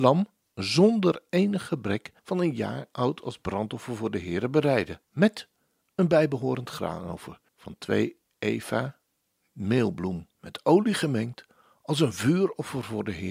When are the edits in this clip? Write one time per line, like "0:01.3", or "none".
0:02.2
0:05.0
0:07.5
0:10.3